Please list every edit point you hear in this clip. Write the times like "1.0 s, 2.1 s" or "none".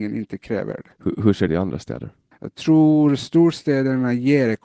0.9 s, 1.5 s, 2.3 s